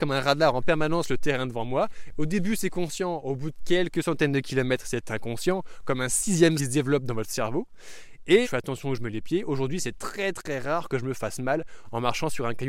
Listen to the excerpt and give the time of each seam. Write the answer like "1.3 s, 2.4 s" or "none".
6.6 s, 8.4 s